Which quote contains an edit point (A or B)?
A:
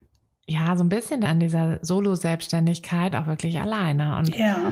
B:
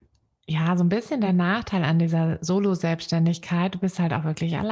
A